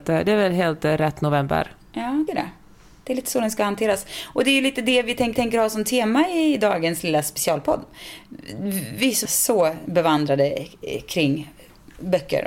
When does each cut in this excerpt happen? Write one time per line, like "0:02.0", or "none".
0:01.8
0:02.3
0:05.3
0:09.3